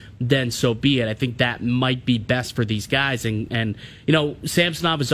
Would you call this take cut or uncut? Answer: uncut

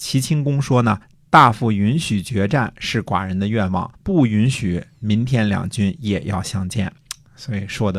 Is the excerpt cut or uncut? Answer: cut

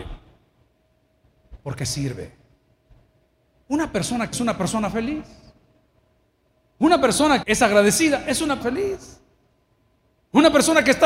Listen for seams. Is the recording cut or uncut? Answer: cut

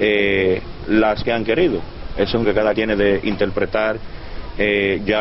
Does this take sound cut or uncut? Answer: cut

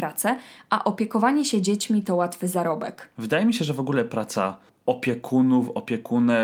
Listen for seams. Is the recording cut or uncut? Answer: cut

